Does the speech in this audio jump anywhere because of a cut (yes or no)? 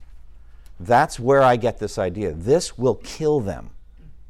no